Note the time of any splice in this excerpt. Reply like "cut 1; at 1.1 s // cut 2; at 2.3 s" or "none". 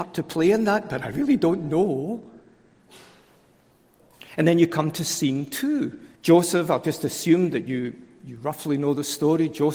cut 1; at 6.1 s